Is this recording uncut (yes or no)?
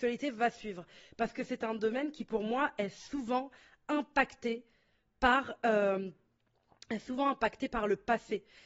yes